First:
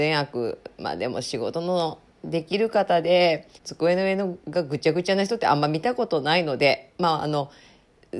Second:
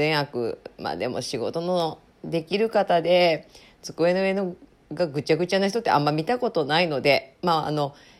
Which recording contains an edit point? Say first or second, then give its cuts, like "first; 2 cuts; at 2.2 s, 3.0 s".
first; 2 cuts; at 3.6 s, 4.4 s